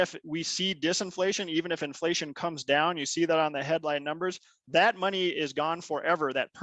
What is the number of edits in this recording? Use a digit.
0